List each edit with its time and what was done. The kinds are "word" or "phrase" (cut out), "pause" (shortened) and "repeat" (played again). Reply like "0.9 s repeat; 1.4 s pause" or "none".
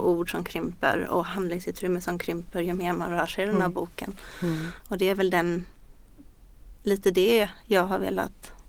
none